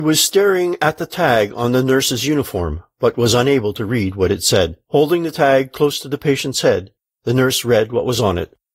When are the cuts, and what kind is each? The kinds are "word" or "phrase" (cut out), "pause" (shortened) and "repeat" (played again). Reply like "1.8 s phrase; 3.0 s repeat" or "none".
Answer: 4.8 s pause